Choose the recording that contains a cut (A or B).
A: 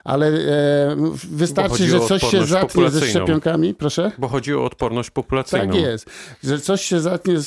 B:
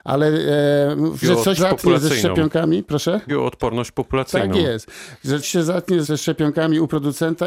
B